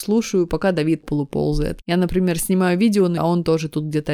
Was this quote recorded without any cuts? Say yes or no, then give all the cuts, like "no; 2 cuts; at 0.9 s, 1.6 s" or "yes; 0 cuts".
no; 2 cuts; at 1.0 s, 3.2 s